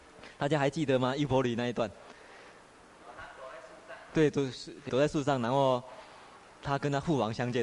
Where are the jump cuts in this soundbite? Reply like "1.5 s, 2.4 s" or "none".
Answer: 4.9 s